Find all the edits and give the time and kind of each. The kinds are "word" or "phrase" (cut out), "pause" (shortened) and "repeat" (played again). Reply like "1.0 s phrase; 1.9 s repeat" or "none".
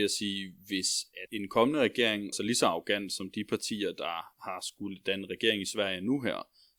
1.3 s word; 2.3 s word